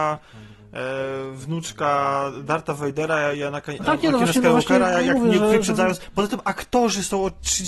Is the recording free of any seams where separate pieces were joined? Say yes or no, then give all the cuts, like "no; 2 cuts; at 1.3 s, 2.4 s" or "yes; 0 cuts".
yes; 0 cuts